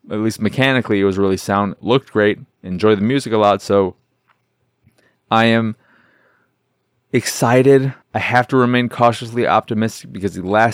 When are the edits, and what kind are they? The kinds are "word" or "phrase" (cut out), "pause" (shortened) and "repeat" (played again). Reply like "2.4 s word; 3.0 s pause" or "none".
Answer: 8.0 s pause